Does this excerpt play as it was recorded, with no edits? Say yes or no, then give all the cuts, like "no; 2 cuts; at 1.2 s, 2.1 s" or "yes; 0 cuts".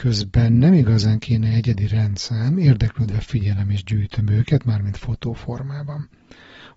yes; 0 cuts